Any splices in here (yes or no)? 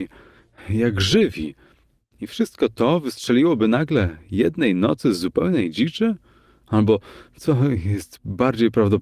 no